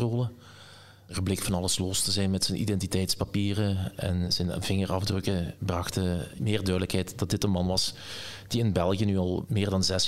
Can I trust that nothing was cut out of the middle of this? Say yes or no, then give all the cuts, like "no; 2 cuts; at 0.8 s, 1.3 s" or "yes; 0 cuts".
yes; 0 cuts